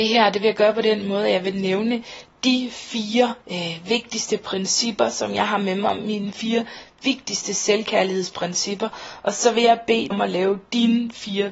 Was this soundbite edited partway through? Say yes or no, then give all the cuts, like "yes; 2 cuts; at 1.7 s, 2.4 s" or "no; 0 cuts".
yes; 2 cuts; at 3.4 s, 10.1 s